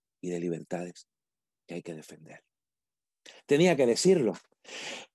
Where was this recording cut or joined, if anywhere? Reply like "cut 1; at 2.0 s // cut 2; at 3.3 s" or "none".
none

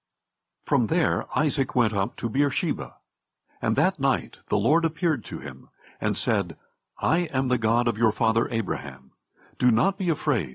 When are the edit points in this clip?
none

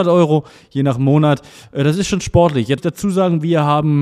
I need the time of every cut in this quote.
cut 1; at 2.8 s

